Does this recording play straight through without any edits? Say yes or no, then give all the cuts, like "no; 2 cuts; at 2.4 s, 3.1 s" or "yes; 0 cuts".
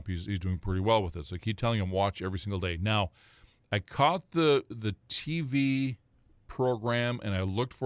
yes; 0 cuts